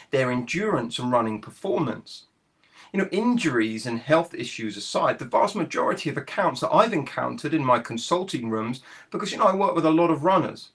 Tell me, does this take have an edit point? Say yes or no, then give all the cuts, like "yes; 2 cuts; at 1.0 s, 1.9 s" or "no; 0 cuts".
no; 0 cuts